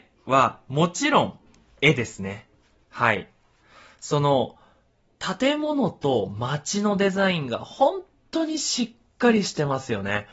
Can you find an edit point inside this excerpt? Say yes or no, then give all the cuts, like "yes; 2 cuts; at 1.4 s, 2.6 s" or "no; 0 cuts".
no; 0 cuts